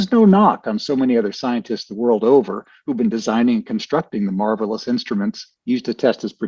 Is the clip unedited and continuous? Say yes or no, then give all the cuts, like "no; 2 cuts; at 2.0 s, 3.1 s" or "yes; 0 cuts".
yes; 0 cuts